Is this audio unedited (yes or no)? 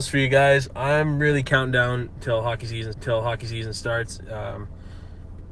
no